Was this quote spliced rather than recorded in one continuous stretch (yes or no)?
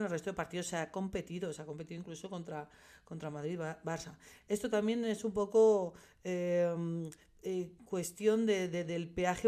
no